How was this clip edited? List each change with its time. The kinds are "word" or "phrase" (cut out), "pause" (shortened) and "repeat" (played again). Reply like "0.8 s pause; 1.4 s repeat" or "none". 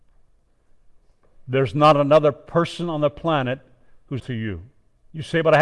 4.2 s word